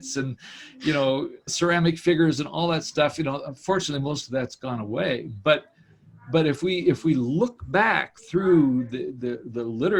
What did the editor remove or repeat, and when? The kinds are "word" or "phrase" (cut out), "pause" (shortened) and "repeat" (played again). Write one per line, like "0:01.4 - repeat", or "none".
0:01.5 - word

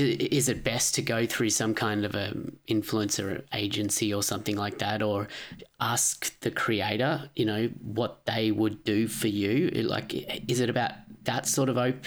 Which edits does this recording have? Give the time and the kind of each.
none

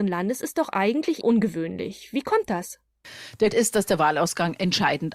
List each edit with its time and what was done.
0:01.2 - word
0:03.5 - word

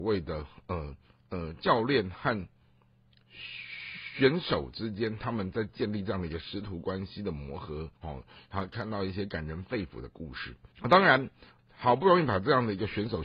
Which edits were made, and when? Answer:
0:01.1 - pause
0:08.0 - pause
0:10.7 - pause
0:11.6 - word

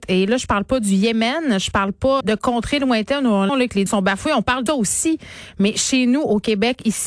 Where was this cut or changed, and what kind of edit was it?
0:02.2 - word
0:03.5 - word
0:03.9 - phrase
0:04.7 - word

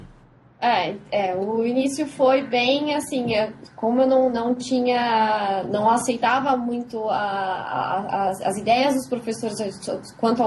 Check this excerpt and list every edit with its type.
none

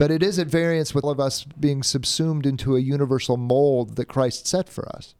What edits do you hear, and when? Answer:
0:01.0 - word
0:01.5 - word

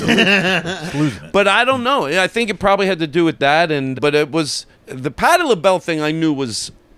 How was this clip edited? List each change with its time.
0:03.9 - word
0:04.7 - pause

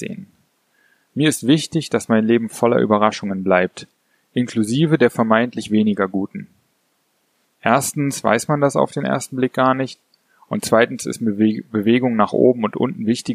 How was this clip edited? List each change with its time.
none

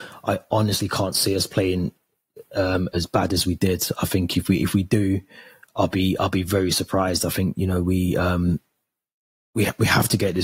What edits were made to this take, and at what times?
none

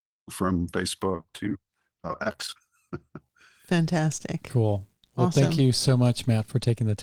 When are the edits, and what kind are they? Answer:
none

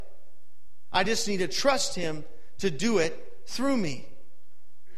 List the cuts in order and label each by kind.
none

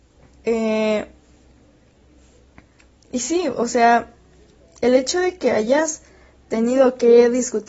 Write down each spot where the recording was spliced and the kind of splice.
none

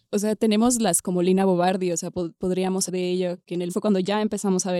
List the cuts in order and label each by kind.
0:01.0 - word
0:02.9 - word
0:03.7 - word

